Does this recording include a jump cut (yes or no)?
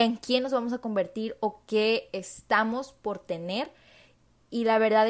no